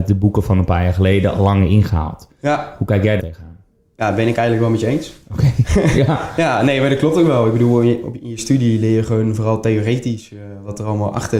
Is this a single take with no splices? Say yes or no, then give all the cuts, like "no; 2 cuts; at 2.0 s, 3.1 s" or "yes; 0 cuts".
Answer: no; 1 cut; at 3.2 s